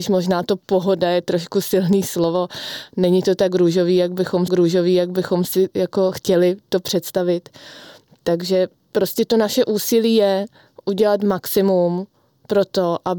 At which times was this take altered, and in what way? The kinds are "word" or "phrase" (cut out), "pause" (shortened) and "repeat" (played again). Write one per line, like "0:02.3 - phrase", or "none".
0:04.5 - repeat

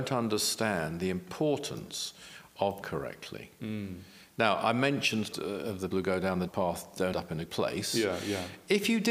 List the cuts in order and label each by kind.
0:02.8 - word
0:05.3 - word
0:05.9 - word
0:06.5 - word
0:07.1 - word
0:07.5 - word

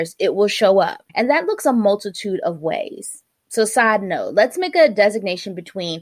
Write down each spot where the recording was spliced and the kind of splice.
0:01.1 - pause

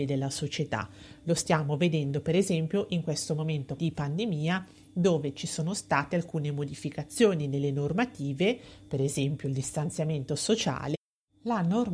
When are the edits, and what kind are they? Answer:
0:03.8 - word

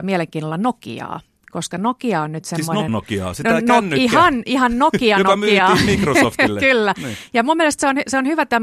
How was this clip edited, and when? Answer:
0:02.9 - word

